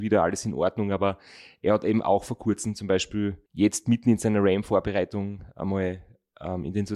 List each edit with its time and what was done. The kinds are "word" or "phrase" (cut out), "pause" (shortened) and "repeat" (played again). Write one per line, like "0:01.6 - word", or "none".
0:03.5 - pause